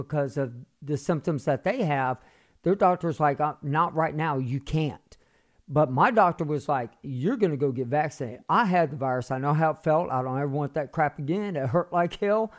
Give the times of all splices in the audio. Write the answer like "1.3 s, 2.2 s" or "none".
none